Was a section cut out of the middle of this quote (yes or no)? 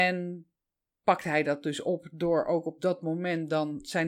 no